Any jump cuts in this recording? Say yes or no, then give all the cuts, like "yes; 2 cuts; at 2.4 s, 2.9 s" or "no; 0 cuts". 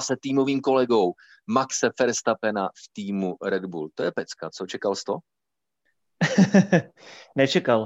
no; 0 cuts